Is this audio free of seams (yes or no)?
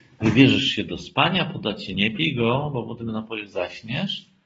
no